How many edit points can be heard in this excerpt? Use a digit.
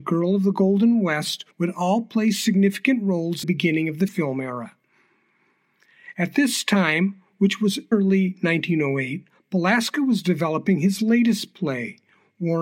3